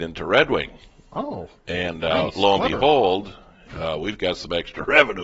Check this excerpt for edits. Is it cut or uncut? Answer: uncut